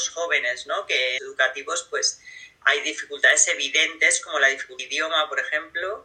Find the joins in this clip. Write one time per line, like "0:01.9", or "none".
0:01.2
0:04.8

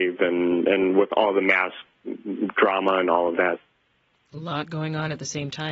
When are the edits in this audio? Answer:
none

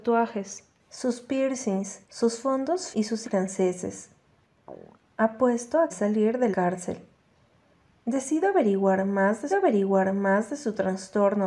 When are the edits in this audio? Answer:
0:02.0
0:02.9
0:03.2
0:05.9
0:06.5
0:09.5

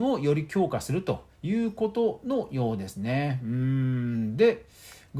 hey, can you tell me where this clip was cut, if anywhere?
0:01.3

